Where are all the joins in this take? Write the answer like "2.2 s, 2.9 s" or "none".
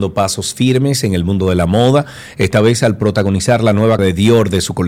4.0 s

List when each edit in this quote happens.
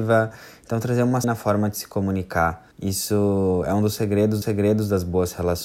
1.2 s, 2.7 s, 4.4 s

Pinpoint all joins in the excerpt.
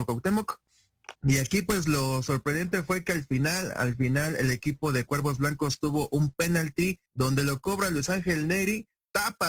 1.2 s, 7.1 s

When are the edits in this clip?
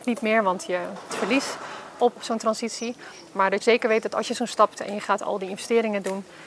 1.1 s, 2.2 s, 3.6 s, 4.8 s

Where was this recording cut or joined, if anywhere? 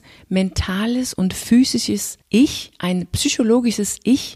2.2 s

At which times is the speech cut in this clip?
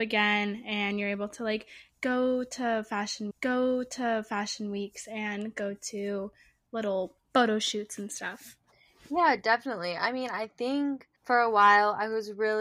3.3 s, 7.2 s, 11.2 s

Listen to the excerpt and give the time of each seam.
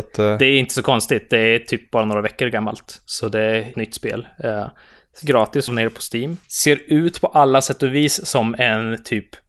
3.7 s, 5.2 s, 5.7 s, 6.4 s

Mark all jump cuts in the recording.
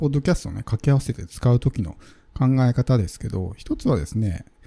none

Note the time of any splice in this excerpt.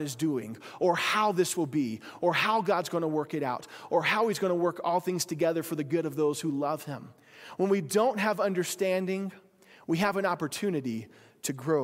none

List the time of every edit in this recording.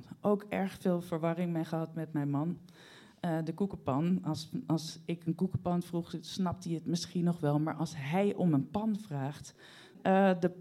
none

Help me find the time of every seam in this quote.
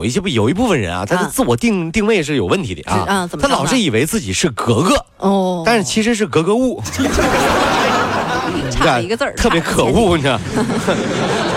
5.1 s

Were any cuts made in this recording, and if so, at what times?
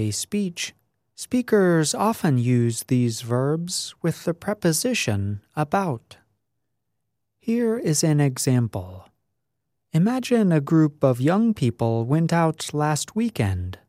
none

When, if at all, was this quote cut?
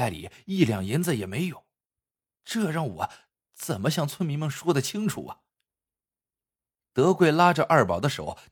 none

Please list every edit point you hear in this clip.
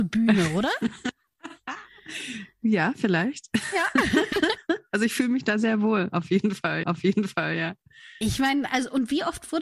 6.8 s

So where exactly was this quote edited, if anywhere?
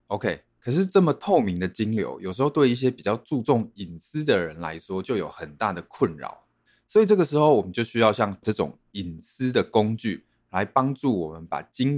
8.4 s

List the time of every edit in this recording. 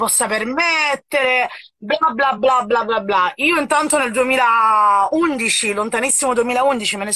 none

